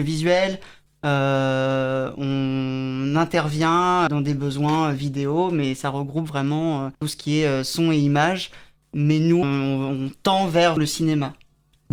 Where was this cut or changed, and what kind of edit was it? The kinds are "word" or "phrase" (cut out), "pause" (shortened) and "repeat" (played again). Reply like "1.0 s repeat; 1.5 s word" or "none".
4.1 s word; 6.9 s pause; 9.4 s word; 10.8 s word